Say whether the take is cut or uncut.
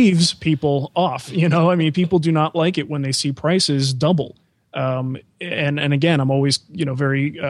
uncut